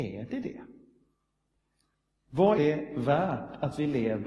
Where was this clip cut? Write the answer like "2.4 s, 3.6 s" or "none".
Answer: 2.6 s

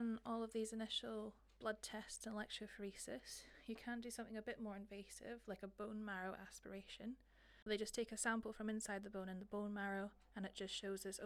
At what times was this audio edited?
none

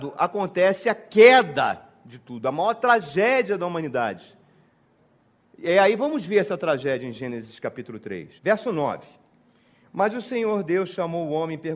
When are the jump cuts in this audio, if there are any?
8.4 s

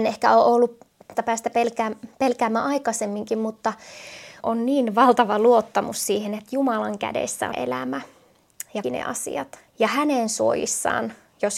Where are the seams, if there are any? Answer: 1.1 s, 4.4 s, 7.5 s, 8.8 s, 9.7 s

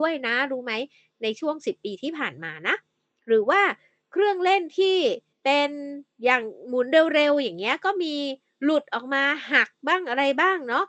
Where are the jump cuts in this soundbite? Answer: 5.3 s

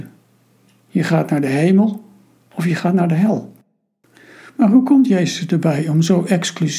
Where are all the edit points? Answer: none

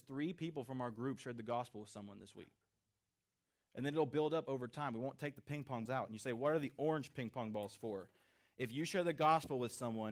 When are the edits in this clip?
5.9 s

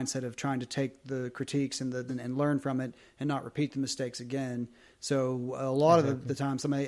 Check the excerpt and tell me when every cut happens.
2.1 s

